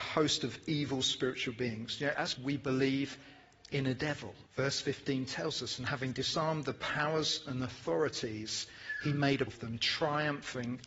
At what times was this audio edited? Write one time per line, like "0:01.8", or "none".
0:02.4
0:04.5
0:09.5

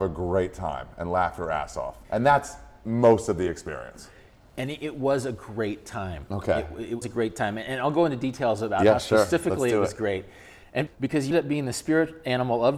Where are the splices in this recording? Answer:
0:02.0
0:07.0
0:10.9
0:11.3

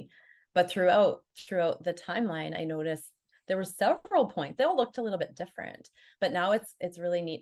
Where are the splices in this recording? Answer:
none

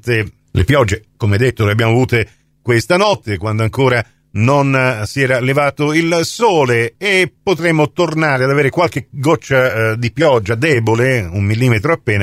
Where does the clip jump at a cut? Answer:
none

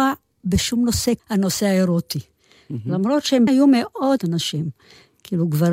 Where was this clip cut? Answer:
0:01.2
0:03.5
0:04.2

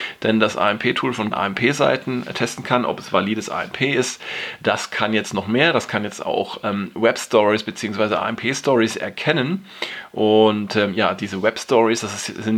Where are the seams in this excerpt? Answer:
0:01.3

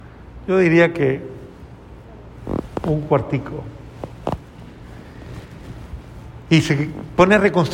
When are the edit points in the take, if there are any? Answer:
none

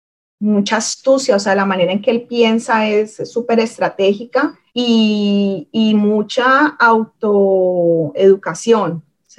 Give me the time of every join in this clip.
0:04.7

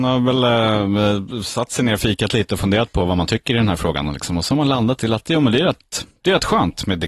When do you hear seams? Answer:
none

